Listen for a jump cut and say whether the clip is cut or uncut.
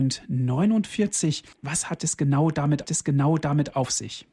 cut